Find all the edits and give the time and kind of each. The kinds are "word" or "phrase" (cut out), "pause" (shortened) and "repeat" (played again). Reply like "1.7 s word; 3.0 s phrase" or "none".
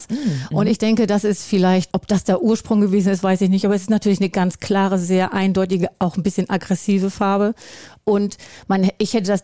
1.9 s word